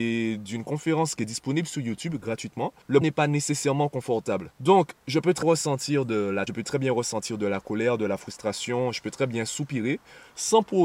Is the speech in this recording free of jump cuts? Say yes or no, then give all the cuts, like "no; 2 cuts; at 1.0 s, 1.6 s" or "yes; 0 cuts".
no; 3 cuts; at 3.0 s, 5.4 s, 6.5 s